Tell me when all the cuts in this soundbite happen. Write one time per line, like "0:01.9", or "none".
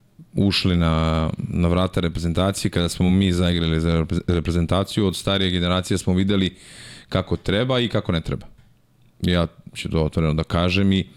none